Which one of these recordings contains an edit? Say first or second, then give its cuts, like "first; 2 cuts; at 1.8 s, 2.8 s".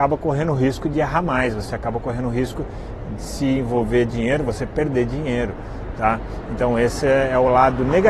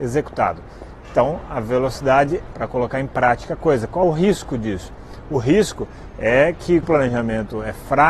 second; 3 cuts; at 2.5 s, 4.0 s, 6.8 s